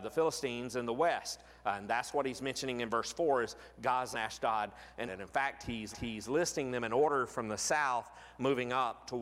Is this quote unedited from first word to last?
no; 3 cuts; at 4.1 s, 5.1 s, 5.9 s

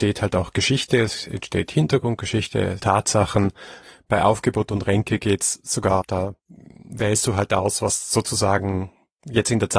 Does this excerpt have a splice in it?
yes; 3 cuts; at 2.8 s, 6.0 s, 6.4 s

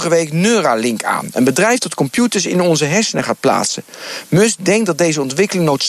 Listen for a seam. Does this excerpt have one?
no; 0 cuts

